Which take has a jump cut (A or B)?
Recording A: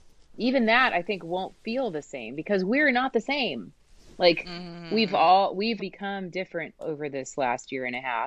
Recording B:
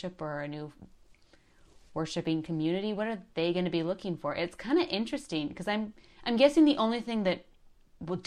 A